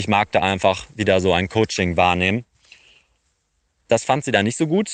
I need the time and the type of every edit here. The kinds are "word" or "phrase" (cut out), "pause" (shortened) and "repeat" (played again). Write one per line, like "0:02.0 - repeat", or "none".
none